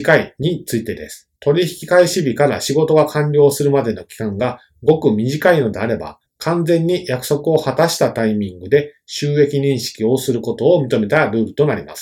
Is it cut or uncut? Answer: cut